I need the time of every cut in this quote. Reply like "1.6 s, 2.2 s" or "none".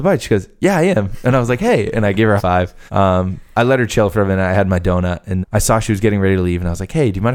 2.4 s, 2.9 s, 5.4 s